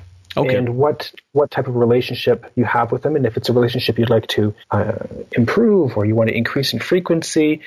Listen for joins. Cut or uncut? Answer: cut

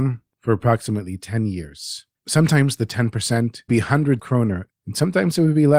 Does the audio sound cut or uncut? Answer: cut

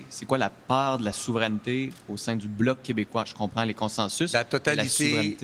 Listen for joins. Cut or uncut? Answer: uncut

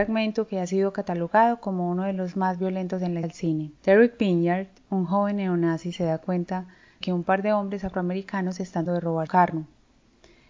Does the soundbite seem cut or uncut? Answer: cut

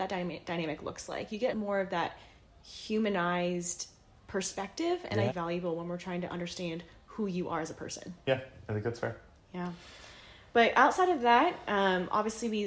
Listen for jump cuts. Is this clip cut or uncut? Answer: cut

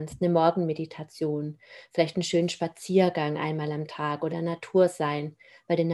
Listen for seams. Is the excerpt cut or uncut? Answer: cut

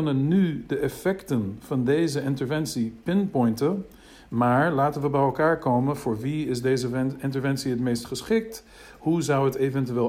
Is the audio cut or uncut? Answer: uncut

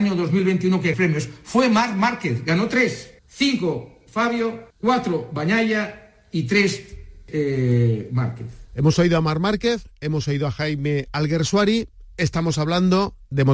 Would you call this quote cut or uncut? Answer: cut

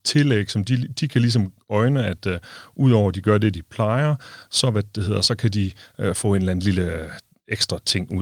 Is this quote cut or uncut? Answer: uncut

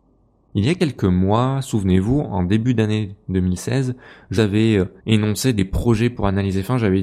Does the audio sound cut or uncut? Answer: cut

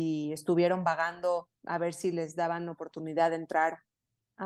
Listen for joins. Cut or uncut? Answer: cut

